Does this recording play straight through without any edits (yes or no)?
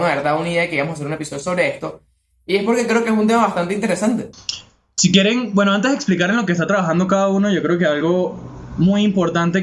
yes